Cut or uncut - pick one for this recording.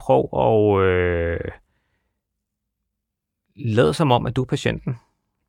uncut